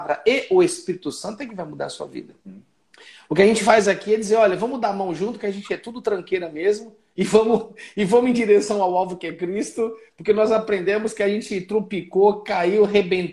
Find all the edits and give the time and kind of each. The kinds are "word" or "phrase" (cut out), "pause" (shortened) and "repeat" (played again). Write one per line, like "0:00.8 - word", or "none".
0:02.4 - pause